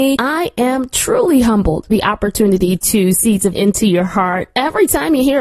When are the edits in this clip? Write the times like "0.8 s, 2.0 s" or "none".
1.9 s, 3.1 s, 3.5 s